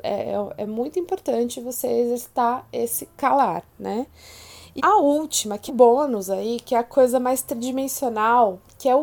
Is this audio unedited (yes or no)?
no